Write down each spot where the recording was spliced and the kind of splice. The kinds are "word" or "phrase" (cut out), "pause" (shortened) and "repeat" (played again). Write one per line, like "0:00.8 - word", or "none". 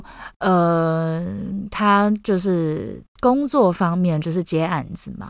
0:03.1 - pause

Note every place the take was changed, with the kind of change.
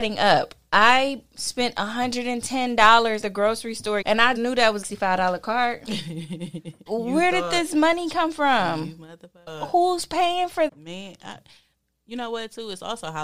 0:03.2 - word
0:04.0 - word
0:04.4 - word
0:04.8 - word
0:06.9 - word
0:09.5 - word
0:10.7 - word

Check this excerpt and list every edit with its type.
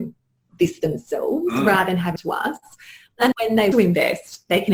0:02.2 - phrase
0:03.3 - word
0:03.7 - phrase

